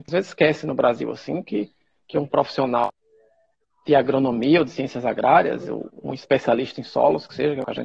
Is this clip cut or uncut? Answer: uncut